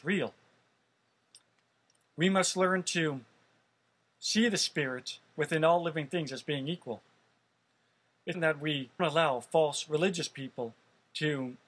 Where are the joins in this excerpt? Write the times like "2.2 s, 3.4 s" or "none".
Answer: 8.3 s, 9.0 s